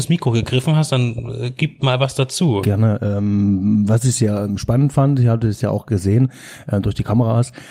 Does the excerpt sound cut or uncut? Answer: uncut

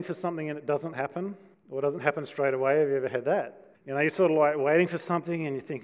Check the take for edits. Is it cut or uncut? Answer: cut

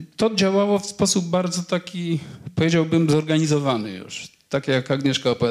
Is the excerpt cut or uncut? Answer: uncut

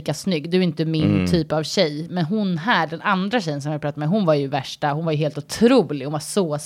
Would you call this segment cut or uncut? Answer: uncut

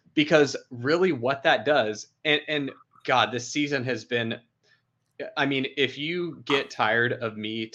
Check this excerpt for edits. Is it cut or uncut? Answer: uncut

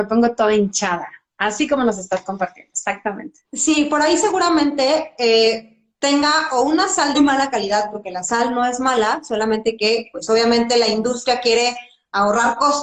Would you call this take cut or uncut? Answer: cut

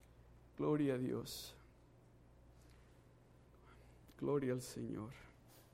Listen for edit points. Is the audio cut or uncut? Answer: uncut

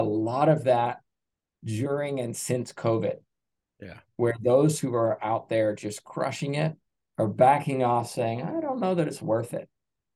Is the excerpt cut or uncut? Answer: uncut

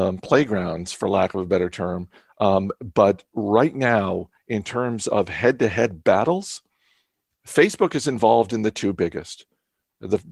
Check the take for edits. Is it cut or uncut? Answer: uncut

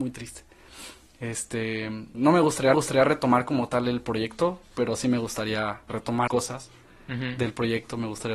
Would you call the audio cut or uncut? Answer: cut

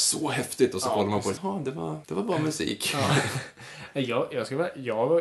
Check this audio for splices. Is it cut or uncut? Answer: cut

